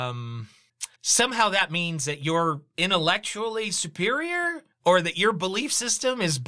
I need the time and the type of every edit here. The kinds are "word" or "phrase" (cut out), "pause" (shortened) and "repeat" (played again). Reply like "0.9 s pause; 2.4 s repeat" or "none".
0.9 s pause; 4.7 s pause